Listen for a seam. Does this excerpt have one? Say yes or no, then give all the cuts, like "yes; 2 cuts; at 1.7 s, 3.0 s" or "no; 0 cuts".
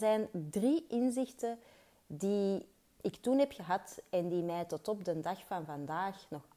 no; 0 cuts